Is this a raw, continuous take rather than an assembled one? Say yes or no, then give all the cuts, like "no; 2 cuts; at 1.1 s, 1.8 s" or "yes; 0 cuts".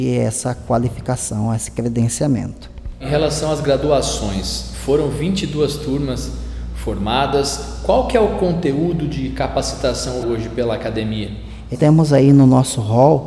no; 2 cuts; at 10.2 s, 11.7 s